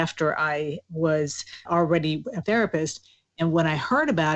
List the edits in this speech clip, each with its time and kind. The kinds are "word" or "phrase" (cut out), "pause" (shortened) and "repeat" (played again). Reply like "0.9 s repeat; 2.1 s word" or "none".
1.7 s word; 2.4 s word